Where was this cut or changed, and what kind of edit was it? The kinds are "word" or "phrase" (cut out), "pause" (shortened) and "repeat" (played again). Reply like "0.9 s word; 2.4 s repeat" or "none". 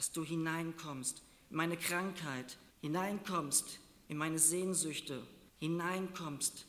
2.7 s pause; 5.5 s pause